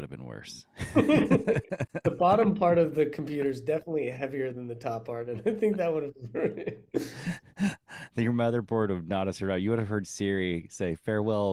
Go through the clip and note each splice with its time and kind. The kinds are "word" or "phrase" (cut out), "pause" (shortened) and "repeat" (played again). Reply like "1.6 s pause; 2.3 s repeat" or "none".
none

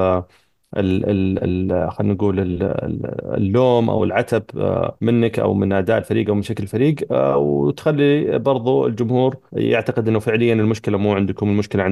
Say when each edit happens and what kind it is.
5.0 s pause; 9.5 s pause

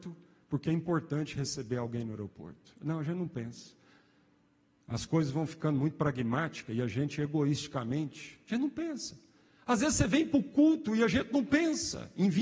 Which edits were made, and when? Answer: none

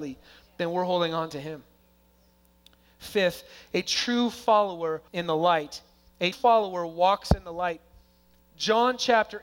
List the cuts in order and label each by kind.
5.1 s word; 6.3 s word

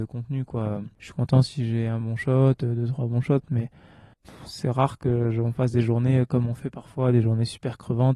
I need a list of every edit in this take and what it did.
none

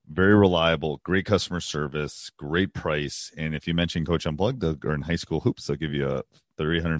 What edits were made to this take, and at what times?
none

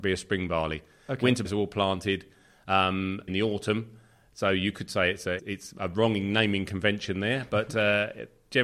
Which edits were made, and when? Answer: 1.4 s word; 3.3 s word; 5.4 s word

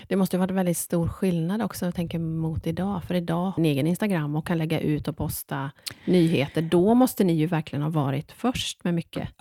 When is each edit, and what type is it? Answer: 3.6 s phrase

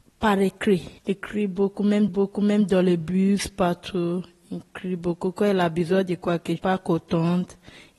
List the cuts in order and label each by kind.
1.0 s pause; 2.1 s repeat; 6.6 s phrase

